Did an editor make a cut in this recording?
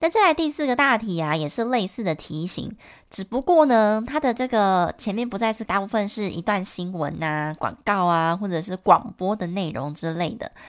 yes; 1 cut; at 5.6 s

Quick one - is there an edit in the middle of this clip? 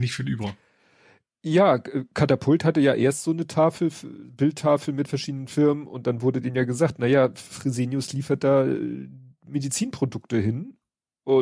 no; 0 cuts

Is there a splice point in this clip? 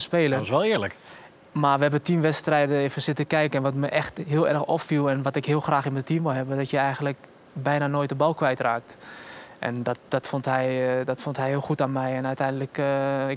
no; 0 cuts

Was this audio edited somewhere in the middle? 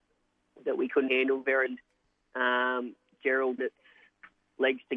yes; 3 cuts; at 1.1 s, 1.7 s, 3.6 s

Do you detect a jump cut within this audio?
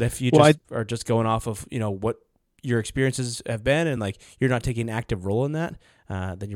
no; 0 cuts

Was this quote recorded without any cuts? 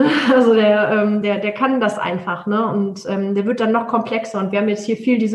yes; 0 cuts

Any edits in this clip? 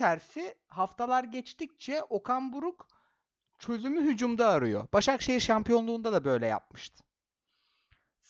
no; 0 cuts

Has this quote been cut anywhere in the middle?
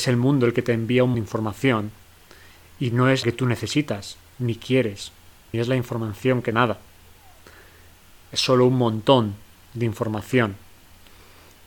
yes; 4 cuts; at 1.1 s, 3.2 s, 5.5 s, 6.5 s

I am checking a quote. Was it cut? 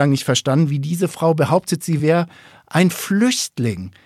no; 0 cuts

